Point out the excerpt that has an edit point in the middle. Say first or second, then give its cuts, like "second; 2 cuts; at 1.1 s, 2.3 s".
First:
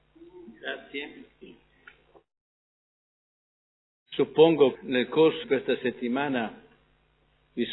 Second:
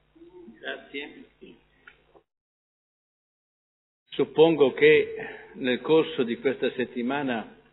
first; 2 cuts; at 4.7 s, 5.4 s